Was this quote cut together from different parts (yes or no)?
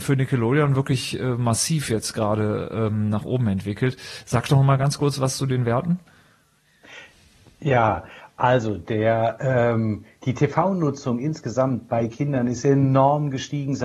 no